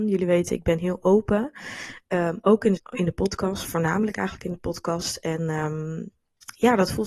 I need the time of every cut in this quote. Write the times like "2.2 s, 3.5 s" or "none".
2.8 s

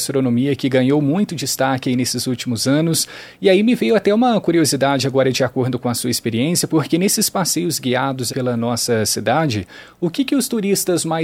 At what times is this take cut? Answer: 8.3 s

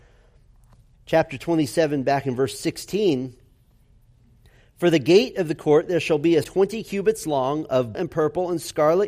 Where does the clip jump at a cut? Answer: 6.4 s, 7.9 s

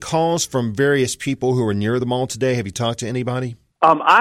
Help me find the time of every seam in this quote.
none

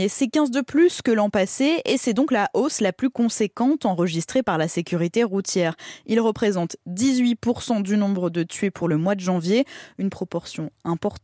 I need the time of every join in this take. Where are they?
none

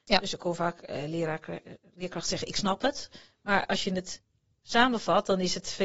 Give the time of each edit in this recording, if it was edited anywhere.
none

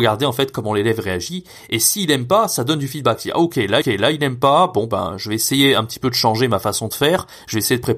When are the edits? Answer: 3.8 s

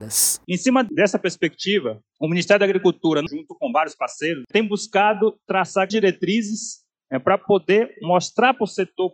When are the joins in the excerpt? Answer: 5.9 s

